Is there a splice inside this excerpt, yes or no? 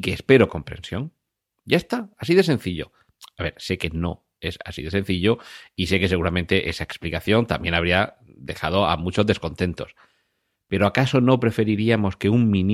no